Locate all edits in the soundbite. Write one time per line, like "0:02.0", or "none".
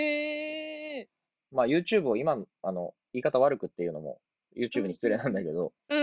none